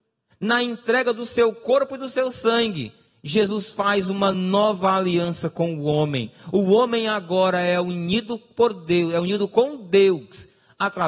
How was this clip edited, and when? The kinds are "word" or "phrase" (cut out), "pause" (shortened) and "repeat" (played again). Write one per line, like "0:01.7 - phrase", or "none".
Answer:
none